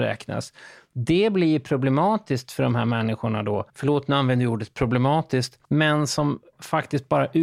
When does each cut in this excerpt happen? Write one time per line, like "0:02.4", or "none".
0:03.7
0:05.6